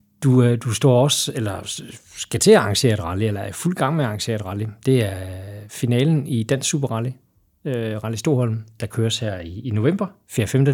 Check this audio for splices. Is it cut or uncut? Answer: uncut